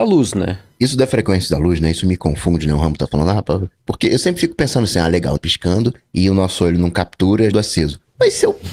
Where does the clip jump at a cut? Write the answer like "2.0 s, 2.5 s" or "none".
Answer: 5.4 s, 7.5 s